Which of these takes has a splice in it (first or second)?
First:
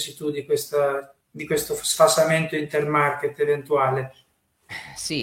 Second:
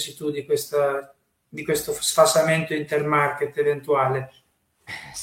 first